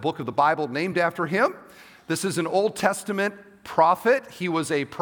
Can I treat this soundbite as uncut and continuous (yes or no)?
yes